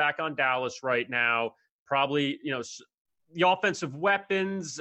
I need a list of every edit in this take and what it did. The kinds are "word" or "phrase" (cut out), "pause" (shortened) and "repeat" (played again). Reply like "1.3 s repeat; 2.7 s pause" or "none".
none

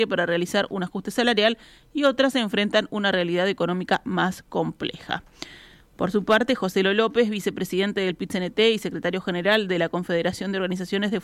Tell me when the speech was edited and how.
none

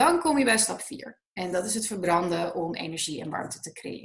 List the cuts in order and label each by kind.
1.3 s pause

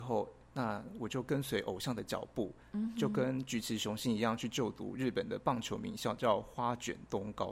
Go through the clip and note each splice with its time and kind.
none

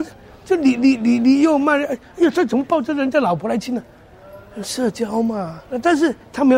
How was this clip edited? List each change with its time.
5.7 s pause

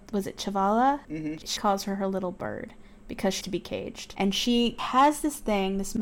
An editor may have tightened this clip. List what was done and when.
1.6 s word; 3.4 s word

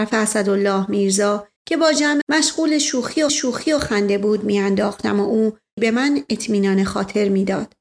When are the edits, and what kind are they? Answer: 1.6 s pause; 2.2 s word; 3.3 s repeat; 5.8 s phrase

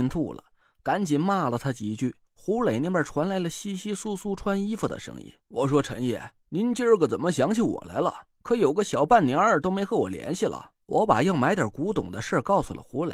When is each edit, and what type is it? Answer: 2.2 s pause; 5.4 s pause; 6.4 s pause; 8.3 s pause; 10.8 s pause

